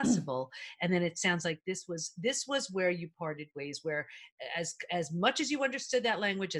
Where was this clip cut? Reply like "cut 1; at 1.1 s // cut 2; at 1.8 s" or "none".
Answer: none